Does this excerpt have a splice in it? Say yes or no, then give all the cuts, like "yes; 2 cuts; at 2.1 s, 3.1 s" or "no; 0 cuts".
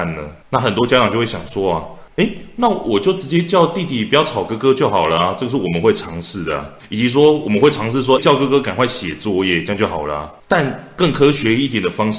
yes; 1 cut; at 8.2 s